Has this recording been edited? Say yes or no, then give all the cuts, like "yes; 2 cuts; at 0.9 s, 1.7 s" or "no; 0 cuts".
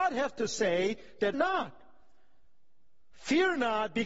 yes; 1 cut; at 1.3 s